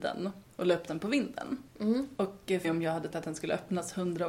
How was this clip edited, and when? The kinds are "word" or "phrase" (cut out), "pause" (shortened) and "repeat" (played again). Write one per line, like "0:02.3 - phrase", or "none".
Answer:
0:02.6 - word
0:03.1 - word